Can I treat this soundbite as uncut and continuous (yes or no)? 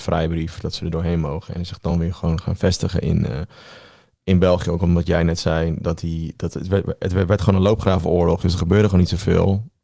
yes